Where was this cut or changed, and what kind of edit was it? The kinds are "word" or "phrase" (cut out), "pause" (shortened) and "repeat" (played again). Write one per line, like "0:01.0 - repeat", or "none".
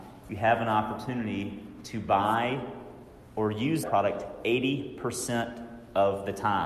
0:03.8 - word